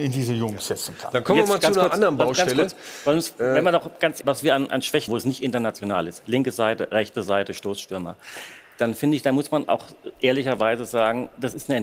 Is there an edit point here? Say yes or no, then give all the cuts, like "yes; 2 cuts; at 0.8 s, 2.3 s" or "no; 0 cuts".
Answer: yes; 3 cuts; at 4.2 s, 4.7 s, 5.1 s